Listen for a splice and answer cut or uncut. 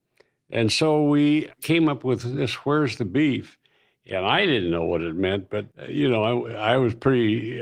cut